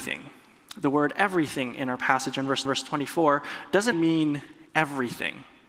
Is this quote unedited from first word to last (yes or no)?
no